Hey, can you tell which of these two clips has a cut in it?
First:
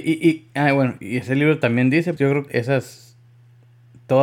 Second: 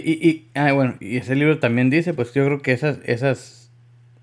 first; 2 cuts; at 2.2 s, 2.5 s

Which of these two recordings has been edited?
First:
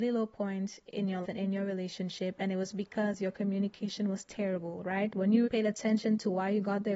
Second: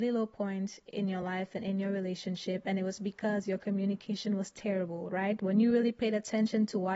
first; 2 cuts; at 1.2 s, 5.4 s

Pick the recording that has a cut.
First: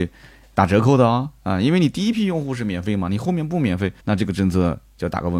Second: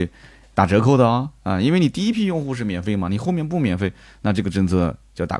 first; 1 cut; at 4.0 s

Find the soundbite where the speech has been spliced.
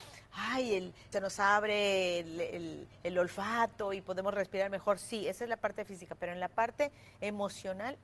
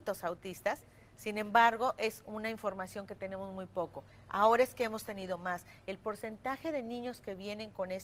first; 1 cut; at 1.1 s

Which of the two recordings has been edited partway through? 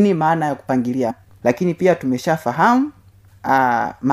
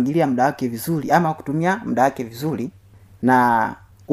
first; 1 cut; at 1.1 s

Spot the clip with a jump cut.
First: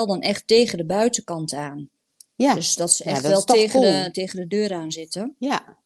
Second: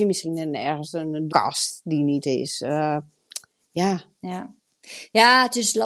second; 3 cuts; at 1.3 s, 2.2 s, 4.1 s

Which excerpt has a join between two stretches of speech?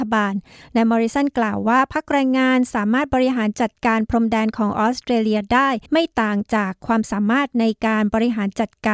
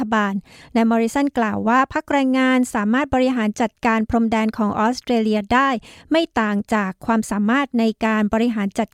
first; 1 cut; at 5.9 s

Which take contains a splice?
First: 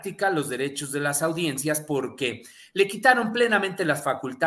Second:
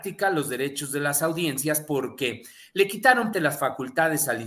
second; 1 cut; at 3.3 s

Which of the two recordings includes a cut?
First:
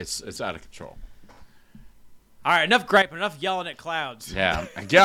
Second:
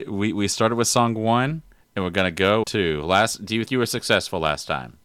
second; 3 cuts; at 1.8 s, 2.6 s, 3.7 s

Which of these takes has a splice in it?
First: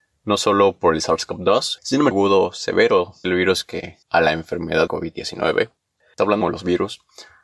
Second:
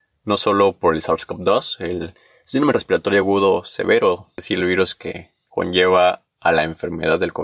first; 6 cuts; at 1.8 s, 2.1 s, 3.2 s, 4.0 s, 4.9 s, 6.4 s

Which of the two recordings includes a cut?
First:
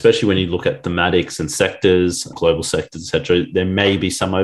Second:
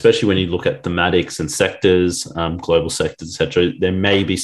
first; 1 cut; at 2.3 s

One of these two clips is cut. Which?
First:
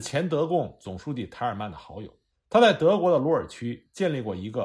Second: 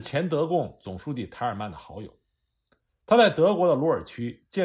first; 1 cut; at 2.3 s

